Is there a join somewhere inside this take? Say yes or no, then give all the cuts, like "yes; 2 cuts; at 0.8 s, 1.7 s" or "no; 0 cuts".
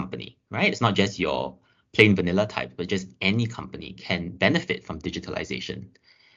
no; 0 cuts